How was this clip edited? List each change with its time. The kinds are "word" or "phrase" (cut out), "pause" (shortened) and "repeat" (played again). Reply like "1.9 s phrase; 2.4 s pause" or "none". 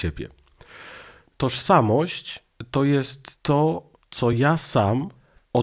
none